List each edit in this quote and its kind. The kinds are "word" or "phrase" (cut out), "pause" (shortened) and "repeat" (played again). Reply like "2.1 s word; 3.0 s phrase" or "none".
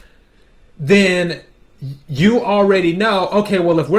none